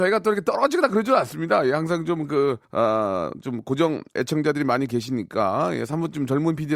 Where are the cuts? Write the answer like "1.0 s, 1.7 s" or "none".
2.6 s, 4.1 s

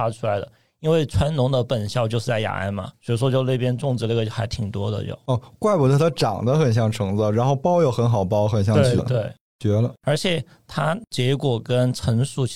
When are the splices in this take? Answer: 2.9 s, 9.0 s

